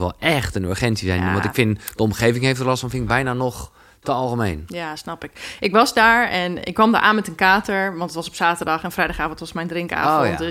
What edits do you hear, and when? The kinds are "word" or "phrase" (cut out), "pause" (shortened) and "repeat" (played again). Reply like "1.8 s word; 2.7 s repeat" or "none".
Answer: none